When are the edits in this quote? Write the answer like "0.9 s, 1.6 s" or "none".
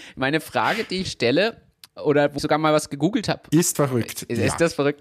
1.0 s, 1.9 s, 2.4 s, 3.7 s